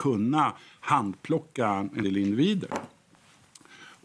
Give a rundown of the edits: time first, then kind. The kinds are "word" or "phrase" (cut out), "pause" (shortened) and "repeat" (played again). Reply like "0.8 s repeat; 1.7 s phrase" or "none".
2.0 s word